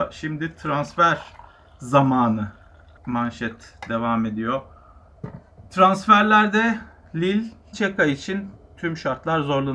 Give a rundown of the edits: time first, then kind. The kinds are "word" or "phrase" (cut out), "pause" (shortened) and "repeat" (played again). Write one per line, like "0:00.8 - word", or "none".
0:03.0 - word
0:07.7 - word